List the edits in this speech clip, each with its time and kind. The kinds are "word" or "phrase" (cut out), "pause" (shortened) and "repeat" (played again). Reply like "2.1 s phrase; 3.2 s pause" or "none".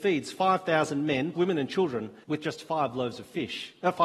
1.3 s word; 2.2 s pause